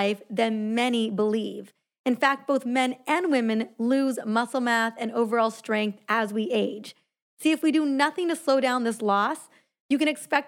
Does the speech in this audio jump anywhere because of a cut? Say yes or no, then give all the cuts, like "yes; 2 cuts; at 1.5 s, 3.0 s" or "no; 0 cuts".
no; 0 cuts